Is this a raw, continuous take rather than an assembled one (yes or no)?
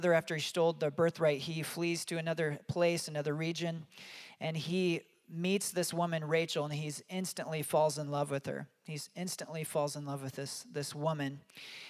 yes